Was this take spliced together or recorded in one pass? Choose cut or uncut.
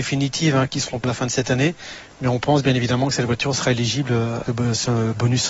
cut